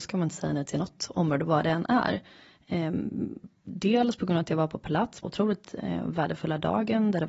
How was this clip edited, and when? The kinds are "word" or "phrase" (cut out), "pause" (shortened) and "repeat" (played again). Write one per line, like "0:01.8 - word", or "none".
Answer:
0:05.2 - phrase